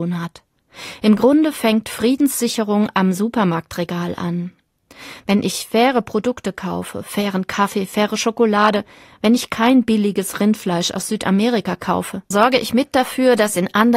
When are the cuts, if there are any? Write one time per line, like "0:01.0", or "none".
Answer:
0:12.3

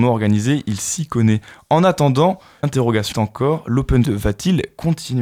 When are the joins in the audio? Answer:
0:02.6
0:03.1
0:04.0

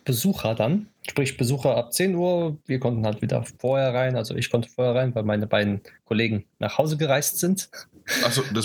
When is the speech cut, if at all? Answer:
0:01.0
0:03.6
0:06.5

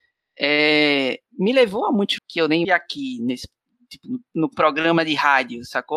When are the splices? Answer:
0:01.3
0:02.2
0:02.6

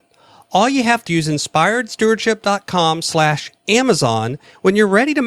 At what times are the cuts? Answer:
0:01.1

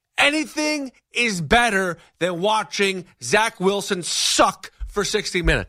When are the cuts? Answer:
none

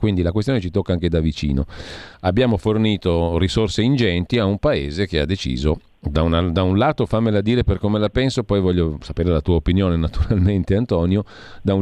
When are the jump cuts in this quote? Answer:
0:02.1

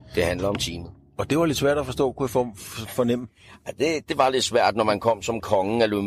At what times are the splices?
none

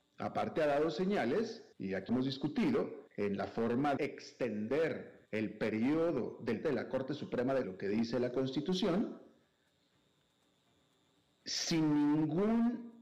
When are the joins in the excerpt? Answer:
0:01.7
0:02.1
0:03.1
0:04.0
0:05.2
0:06.6
0:07.6

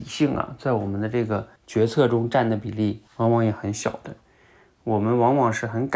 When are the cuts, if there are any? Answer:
0:01.6
0:03.1

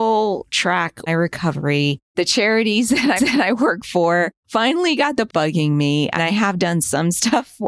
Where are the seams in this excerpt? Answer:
0:01.1
0:02.1
0:03.2
0:05.3
0:06.2

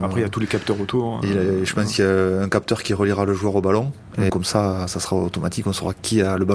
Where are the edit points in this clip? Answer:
0:04.3

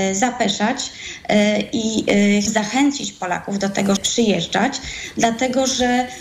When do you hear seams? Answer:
0:02.5
0:04.0

